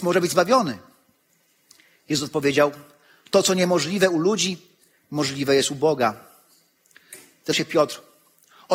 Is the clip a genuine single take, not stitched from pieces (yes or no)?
no